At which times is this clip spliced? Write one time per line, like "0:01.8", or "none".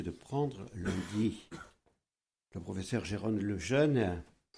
none

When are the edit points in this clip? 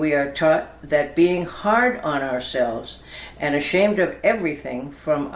none

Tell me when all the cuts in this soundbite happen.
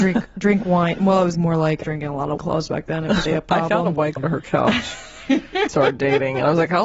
0:01.3
0:01.8
0:02.4
0:03.3
0:04.2
0:05.7

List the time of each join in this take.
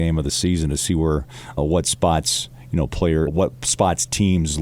0:01.6
0:03.3

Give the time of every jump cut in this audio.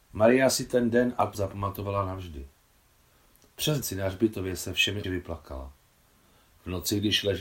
0:01.3
0:03.8
0:05.0

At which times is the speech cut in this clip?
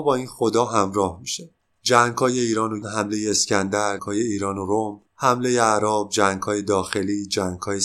0:01.6
0:02.8
0:04.0
0:05.1

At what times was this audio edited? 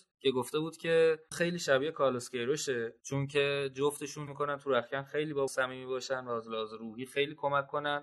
0:01.3
0:04.3
0:05.5

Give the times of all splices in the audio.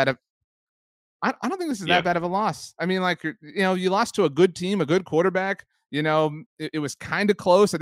none

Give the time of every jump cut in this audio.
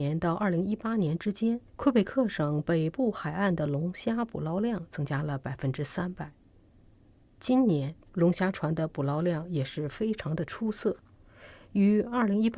0:01.7
0:08.0

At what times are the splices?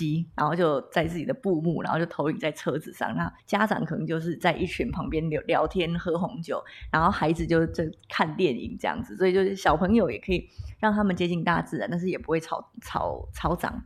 0:03.4

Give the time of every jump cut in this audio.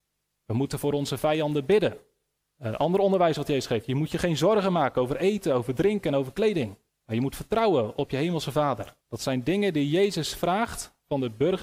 0:02.4
0:06.9
0:09.0

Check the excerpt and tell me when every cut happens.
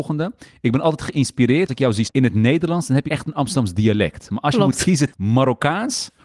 0:01.7
0:02.0
0:03.1
0:05.1

